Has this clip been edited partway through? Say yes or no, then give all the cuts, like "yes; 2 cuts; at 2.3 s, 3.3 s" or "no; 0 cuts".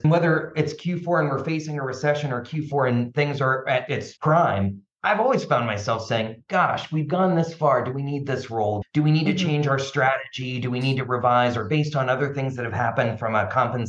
yes; 1 cut; at 4.9 s